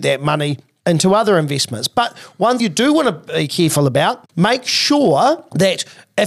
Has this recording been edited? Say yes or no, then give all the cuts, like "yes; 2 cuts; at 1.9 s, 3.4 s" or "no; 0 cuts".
yes; 2 cuts; at 2.6 s, 4.3 s